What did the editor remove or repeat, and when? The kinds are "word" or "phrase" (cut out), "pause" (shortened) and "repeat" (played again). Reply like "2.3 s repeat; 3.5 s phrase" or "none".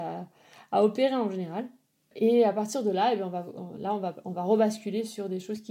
none